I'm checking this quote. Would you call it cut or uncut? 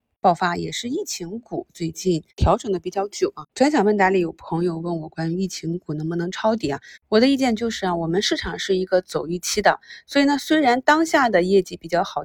cut